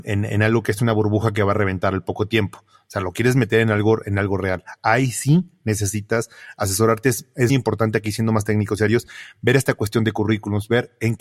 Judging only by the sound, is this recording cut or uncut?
cut